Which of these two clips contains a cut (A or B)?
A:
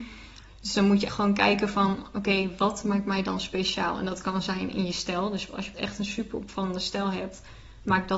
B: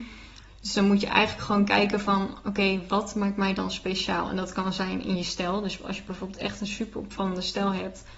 A